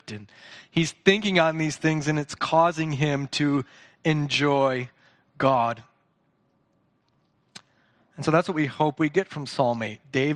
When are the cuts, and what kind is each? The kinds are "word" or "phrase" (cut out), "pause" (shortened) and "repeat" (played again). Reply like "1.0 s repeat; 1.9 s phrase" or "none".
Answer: none

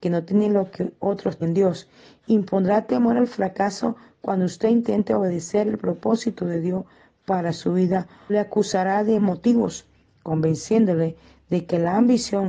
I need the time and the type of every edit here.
1.4 s word; 8.3 s word; 9.2 s word

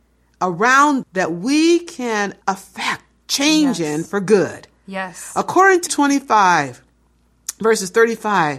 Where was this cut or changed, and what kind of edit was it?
1.0 s word; 2.4 s pause; 5.9 s word

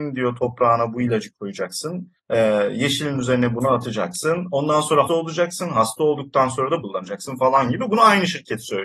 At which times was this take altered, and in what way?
2.2 s pause; 5.1 s word; 6.8 s word

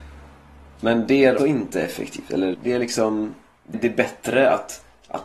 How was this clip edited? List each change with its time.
1.4 s word; 2.5 s word; 3.7 s word

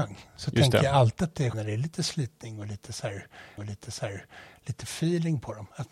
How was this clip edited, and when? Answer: 1.5 s word; 3.6 s repeat

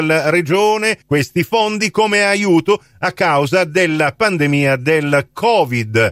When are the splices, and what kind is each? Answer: 1.0 s pause

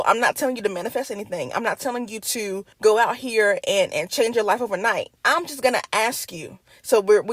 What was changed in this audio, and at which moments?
2.7 s pause; 5.2 s pause

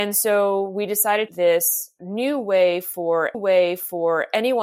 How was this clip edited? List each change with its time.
1.3 s phrase; 3.3 s repeat

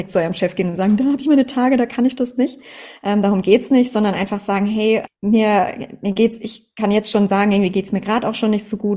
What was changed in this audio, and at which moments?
5.1 s word

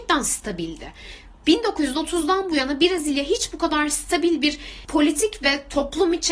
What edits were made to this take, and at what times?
none

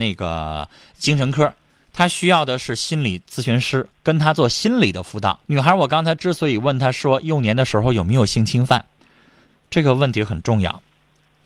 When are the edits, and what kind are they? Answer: 3.9 s pause; 5.4 s pause

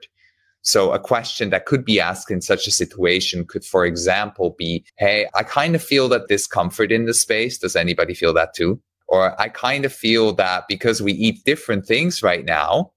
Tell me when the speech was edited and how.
4.9 s pause; 6.3 s phrase

